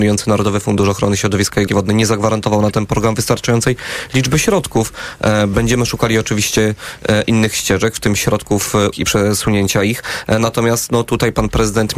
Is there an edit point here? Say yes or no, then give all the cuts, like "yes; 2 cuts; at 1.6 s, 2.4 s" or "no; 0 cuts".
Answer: yes; 2 cuts; at 1.7 s, 8.9 s